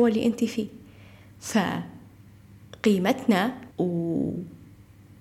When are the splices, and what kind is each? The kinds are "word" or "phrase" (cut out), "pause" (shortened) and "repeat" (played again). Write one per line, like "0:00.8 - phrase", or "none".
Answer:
0:03.7 - pause